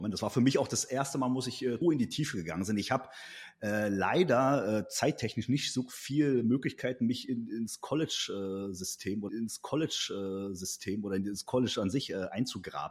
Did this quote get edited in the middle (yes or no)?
yes